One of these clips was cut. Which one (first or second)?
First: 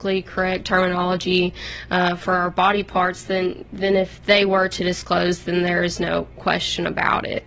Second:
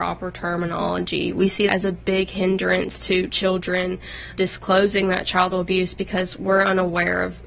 second